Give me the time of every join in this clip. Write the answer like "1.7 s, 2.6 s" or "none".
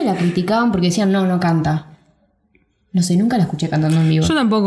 none

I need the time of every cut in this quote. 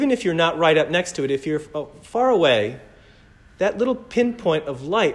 none

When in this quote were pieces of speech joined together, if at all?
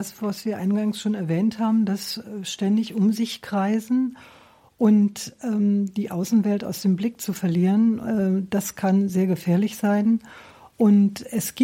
none

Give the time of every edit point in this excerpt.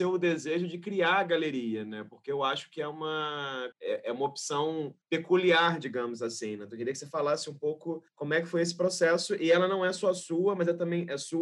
3.7 s, 5.0 s, 8.1 s

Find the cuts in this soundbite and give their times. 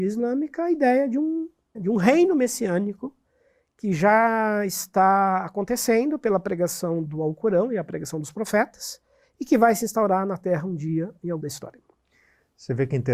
1.7 s, 7.0 s, 11.4 s

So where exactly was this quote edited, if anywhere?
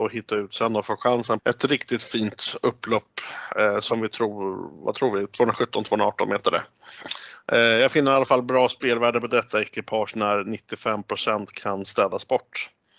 1.4 s

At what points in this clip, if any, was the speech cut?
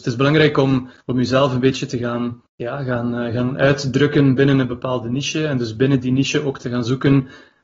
1.0 s, 2.5 s

